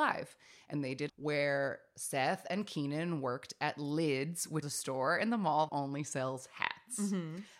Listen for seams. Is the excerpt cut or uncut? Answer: cut